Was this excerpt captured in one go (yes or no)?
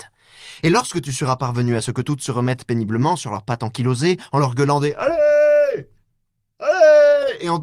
yes